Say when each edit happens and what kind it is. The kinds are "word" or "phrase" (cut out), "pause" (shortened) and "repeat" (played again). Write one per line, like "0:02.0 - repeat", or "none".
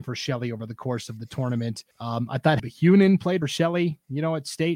0:01.9 - pause
0:02.6 - word
0:03.4 - phrase